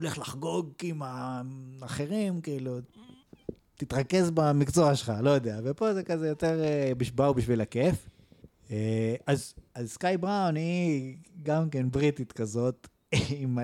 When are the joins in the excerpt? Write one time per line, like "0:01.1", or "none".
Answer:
0:08.4
0:09.7